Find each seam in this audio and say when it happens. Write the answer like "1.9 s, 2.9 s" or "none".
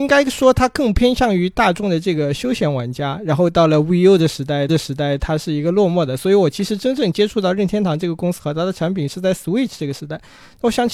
4.7 s